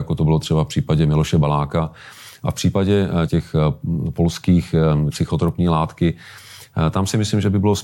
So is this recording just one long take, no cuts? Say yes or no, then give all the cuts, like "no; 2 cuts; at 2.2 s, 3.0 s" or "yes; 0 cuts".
no; 2 cuts; at 3.3 s, 5.1 s